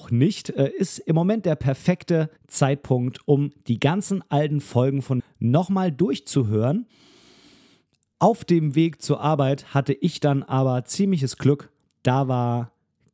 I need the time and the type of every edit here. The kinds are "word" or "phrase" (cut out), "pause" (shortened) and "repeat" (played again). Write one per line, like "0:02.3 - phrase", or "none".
0:02.4 - pause
0:05.2 - word
0:11.9 - pause